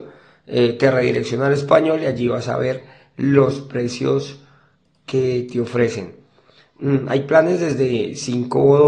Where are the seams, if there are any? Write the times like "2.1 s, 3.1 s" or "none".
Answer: none